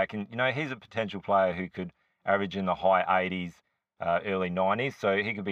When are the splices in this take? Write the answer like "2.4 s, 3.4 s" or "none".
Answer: none